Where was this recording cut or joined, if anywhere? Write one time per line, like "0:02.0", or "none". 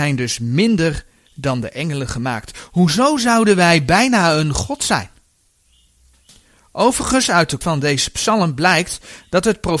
0:07.6